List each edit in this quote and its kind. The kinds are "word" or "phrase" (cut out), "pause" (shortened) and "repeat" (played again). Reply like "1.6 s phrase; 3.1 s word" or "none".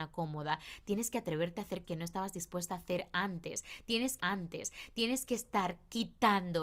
1.8 s word; 4.2 s repeat